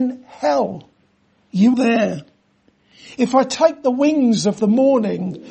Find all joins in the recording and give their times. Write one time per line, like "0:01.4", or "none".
0:01.7